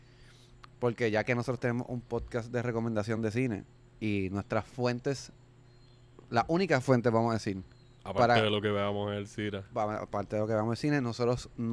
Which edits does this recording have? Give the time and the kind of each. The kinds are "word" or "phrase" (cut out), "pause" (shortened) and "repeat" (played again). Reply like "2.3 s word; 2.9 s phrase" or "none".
none